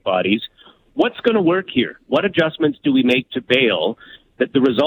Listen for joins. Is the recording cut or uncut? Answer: uncut